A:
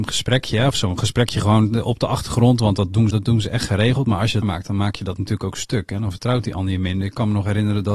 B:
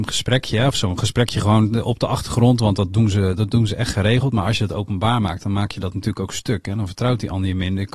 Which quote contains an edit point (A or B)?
A